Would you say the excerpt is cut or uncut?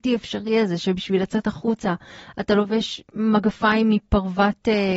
uncut